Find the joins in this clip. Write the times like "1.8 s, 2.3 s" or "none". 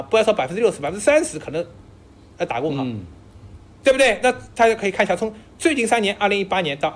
none